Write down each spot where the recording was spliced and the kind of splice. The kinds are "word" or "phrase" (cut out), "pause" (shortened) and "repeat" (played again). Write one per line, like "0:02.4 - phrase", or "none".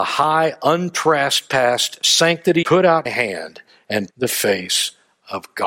0:02.6 - phrase
0:03.1 - word
0:04.1 - word